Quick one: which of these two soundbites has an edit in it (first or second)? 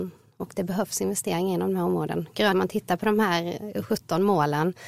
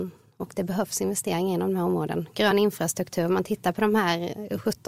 first